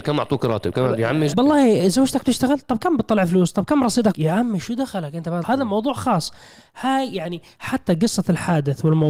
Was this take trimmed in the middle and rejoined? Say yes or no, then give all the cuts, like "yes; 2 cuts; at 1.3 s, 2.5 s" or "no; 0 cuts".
yes; 3 cuts; at 1.3 s, 4.1 s, 5.4 s